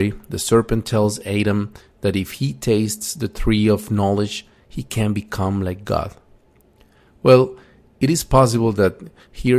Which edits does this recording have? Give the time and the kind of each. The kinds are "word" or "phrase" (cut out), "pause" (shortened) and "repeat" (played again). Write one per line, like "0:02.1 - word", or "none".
none